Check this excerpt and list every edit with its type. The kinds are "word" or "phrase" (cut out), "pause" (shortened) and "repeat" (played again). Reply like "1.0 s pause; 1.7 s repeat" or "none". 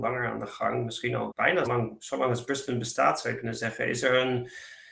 1.3 s word; 1.7 s word